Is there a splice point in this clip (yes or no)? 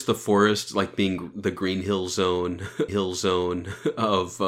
yes